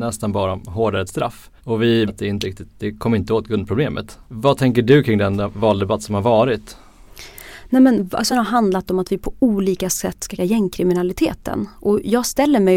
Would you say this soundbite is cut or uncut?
cut